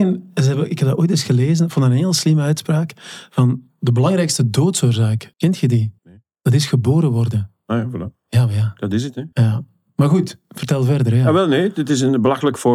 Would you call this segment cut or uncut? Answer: cut